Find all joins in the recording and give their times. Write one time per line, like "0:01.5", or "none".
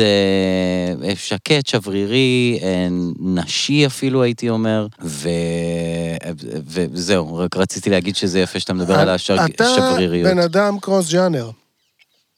0:04.9